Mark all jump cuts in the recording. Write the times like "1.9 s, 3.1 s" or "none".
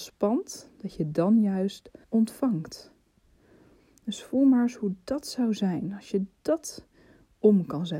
2.0 s